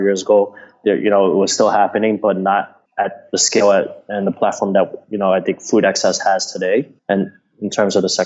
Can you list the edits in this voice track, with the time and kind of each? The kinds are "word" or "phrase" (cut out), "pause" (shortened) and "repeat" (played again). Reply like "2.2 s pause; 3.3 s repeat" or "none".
2.9 s pause; 7.0 s pause

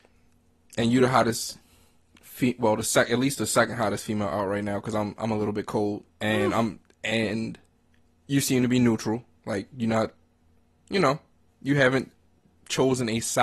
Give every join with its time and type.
6.1 s pause

